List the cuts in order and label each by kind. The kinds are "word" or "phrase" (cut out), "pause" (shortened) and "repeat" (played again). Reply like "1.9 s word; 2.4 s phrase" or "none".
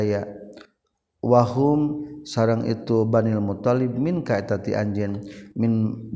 none